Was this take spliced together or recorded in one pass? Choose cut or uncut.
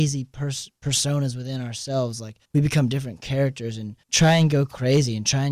cut